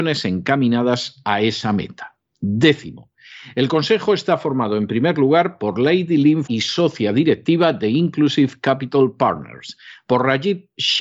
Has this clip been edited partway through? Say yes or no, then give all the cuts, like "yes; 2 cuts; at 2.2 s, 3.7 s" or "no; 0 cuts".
yes; 1 cut; at 6.5 s